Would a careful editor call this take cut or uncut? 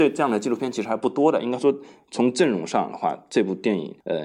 uncut